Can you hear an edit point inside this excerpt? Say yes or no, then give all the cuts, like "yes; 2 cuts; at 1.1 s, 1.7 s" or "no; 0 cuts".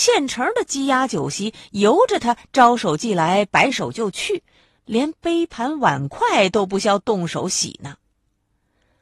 no; 0 cuts